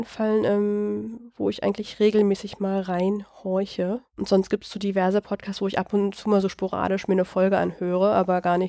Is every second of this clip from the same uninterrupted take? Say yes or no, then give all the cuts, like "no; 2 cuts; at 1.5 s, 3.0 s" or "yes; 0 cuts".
yes; 0 cuts